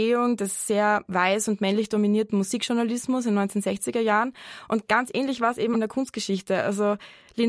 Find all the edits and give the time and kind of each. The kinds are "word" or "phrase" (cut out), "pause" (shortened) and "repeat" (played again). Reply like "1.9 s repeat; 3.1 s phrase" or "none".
5.7 s phrase

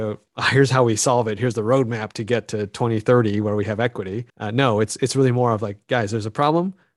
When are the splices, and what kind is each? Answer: 4.3 s pause

